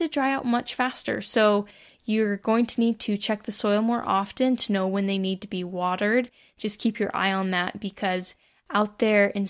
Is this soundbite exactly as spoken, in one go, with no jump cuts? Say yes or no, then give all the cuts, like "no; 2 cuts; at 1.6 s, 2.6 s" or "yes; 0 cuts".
yes; 0 cuts